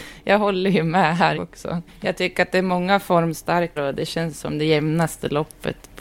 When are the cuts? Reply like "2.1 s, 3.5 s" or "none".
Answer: 1.3 s, 1.9 s, 3.8 s